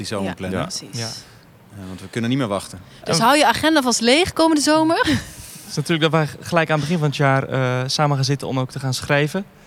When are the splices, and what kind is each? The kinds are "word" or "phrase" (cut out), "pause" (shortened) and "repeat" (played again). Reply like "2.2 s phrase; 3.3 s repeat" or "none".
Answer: none